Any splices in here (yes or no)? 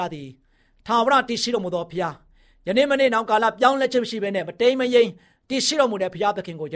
no